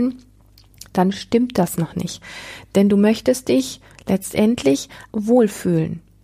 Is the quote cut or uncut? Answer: cut